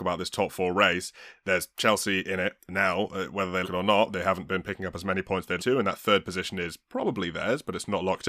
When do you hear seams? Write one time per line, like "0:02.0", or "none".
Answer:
0:03.6
0:05.6

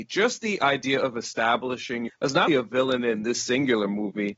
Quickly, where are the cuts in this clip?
0:02.1
0:02.5

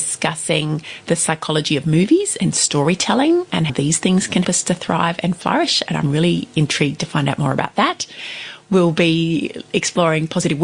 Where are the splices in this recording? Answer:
0:03.7
0:04.4

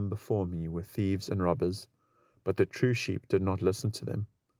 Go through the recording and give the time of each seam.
none

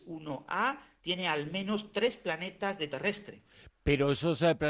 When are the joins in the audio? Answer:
0:02.9

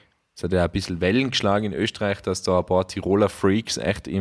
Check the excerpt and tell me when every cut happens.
none

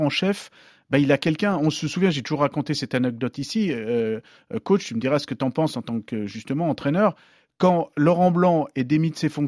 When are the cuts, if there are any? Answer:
none

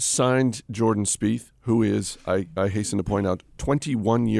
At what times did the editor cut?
none

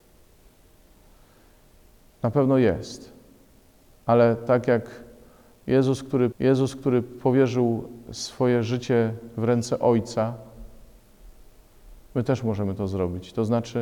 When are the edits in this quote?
0:03.8
0:06.3

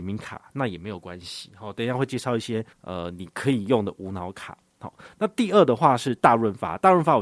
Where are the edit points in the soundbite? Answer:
0:02.7

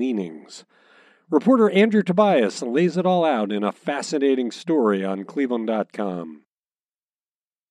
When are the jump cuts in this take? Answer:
none

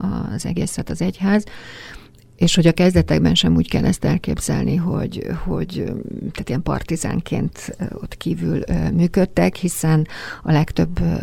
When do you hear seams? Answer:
none

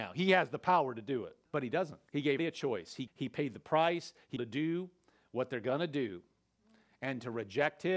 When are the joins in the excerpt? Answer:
0:01.4
0:02.1
0:02.4
0:03.1
0:04.4

